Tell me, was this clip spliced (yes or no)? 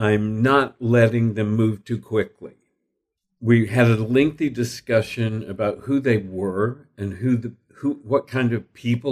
no